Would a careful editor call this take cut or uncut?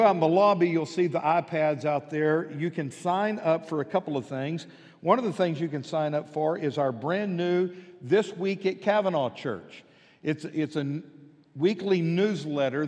uncut